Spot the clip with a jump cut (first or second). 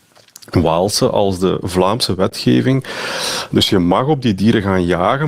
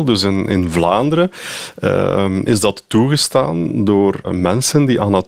second